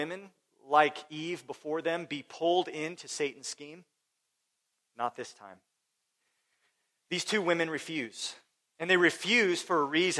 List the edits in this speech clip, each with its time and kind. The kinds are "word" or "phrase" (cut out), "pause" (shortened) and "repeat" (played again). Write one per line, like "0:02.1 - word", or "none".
none